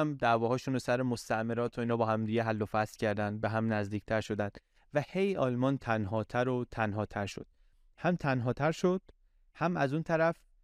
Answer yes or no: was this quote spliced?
no